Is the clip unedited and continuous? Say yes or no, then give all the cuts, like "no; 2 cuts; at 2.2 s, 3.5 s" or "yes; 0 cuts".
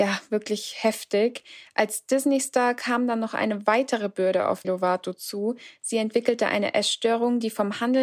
no; 1 cut; at 4.6 s